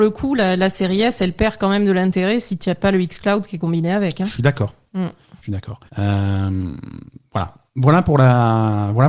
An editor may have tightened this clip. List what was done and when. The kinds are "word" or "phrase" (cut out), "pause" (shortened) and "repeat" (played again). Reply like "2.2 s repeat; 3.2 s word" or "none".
5.4 s pause; 5.9 s pause